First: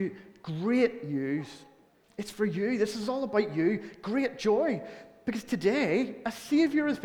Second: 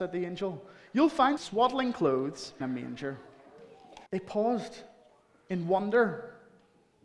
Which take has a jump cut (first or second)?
second